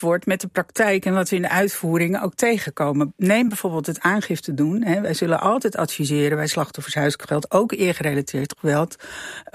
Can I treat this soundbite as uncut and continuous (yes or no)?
yes